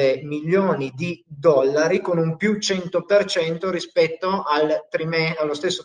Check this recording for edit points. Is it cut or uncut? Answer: uncut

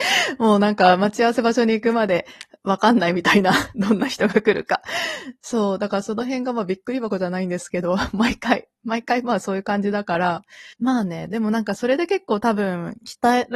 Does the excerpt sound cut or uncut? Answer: cut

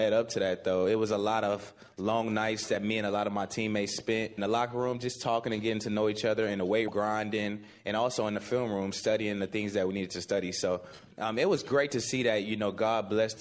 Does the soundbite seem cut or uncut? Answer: cut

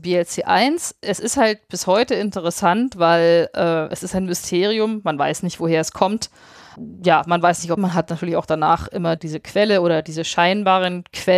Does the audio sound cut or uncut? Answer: cut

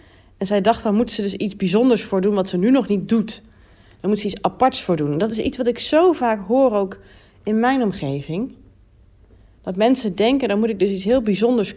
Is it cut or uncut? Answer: uncut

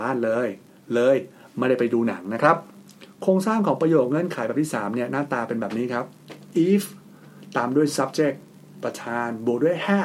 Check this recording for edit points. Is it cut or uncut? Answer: uncut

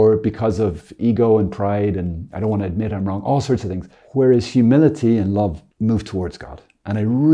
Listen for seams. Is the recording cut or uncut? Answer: cut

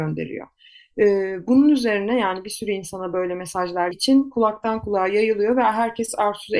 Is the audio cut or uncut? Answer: cut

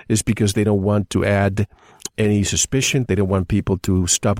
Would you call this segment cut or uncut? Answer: uncut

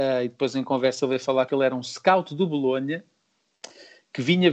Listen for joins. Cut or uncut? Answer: cut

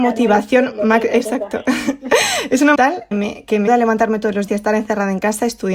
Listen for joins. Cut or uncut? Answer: cut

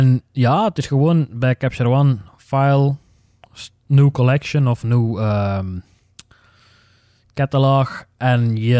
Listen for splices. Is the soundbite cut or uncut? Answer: uncut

